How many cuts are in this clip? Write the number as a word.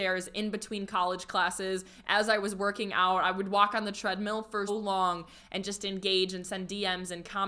one